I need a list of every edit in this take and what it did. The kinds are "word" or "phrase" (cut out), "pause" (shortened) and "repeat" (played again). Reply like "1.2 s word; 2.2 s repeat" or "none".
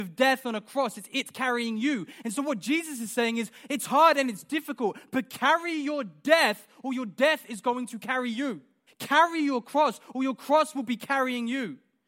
8.9 s pause